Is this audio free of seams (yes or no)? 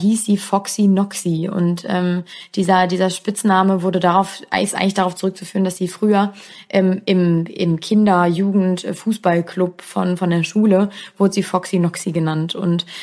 yes